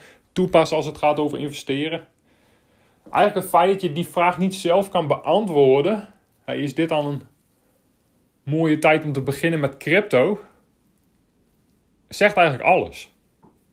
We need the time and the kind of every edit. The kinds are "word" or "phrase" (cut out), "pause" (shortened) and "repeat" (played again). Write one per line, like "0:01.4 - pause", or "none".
none